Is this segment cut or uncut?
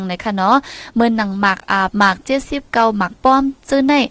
cut